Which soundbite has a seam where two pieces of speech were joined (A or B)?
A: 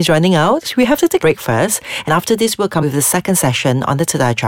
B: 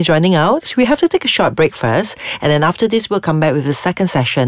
A